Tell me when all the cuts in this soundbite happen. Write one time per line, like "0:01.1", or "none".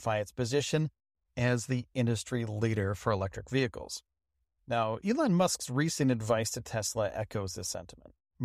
none